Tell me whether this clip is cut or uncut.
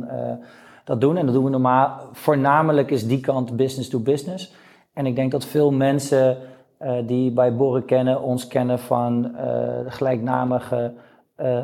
uncut